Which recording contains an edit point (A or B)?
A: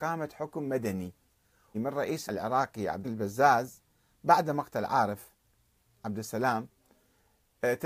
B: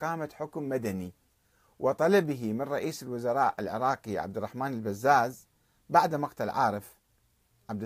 A